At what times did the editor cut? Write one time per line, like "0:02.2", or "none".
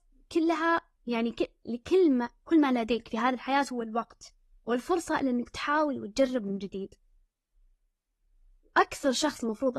none